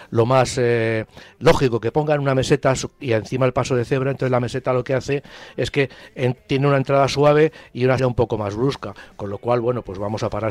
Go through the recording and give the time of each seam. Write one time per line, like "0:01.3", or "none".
0:08.0

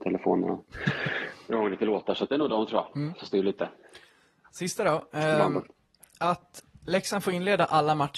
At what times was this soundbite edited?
none

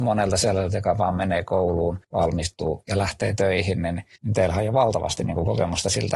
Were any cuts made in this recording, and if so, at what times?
0:02.0
0:04.2

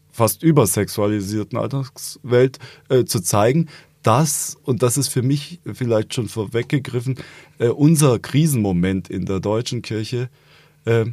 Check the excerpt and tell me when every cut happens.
none

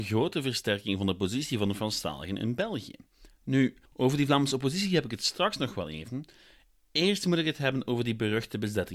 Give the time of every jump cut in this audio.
0:03.8

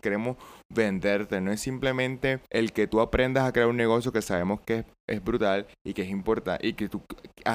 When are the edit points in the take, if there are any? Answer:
0:02.5

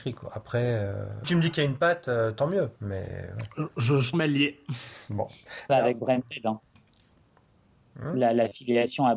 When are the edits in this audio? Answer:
0:01.2
0:02.8
0:04.1

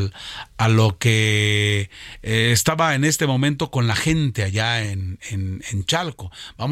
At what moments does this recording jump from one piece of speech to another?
none

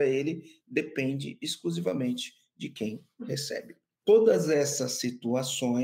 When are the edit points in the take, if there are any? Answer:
none

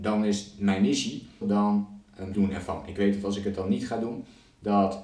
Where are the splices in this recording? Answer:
0:01.4
0:02.3

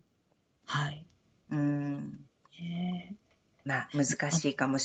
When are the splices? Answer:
none

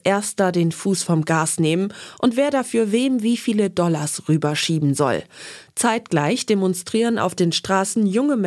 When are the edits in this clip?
none

